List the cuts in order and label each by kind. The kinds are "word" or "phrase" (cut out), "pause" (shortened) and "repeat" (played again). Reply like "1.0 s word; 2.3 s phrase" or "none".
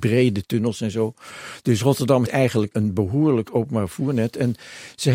2.2 s word; 2.7 s word; 3.5 s word